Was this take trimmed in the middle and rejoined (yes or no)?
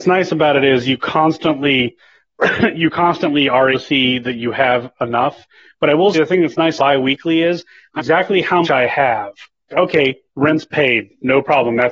yes